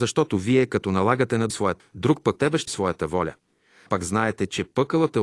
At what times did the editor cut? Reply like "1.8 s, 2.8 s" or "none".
1.5 s, 1.8 s, 2.4 s, 2.7 s, 3.9 s